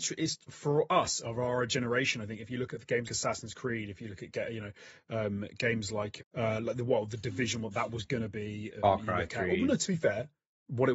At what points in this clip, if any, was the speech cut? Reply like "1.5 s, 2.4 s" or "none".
3.0 s, 6.2 s